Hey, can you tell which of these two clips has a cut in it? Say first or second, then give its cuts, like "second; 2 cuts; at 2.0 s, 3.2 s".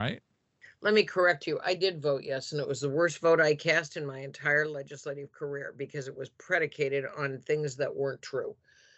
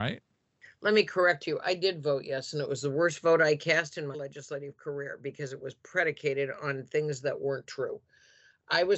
second; 1 cut; at 4.1 s